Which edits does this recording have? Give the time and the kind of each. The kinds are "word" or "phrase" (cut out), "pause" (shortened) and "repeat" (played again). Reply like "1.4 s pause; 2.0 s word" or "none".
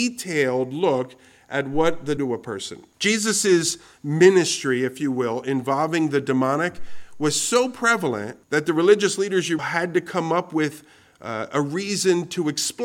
2.2 s phrase; 2.9 s pause; 8.4 s pause; 9.6 s word